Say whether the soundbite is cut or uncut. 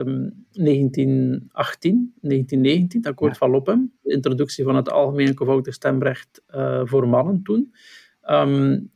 uncut